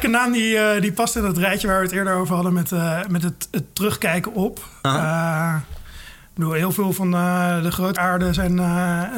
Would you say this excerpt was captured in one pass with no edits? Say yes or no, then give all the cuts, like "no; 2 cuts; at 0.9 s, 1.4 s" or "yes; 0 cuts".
no; 1 cut; at 8.0 s